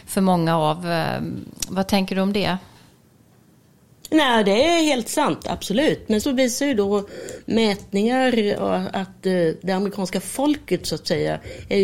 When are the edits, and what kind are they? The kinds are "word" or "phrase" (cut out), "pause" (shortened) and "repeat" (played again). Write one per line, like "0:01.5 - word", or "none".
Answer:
0:06.2 - word